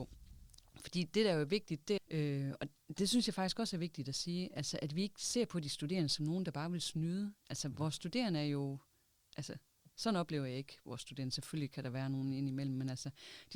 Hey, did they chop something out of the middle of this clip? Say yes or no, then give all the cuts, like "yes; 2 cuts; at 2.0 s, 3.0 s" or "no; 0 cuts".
yes; 1 cut; at 2.0 s